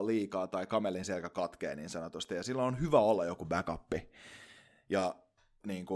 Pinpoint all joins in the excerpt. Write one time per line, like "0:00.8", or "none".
none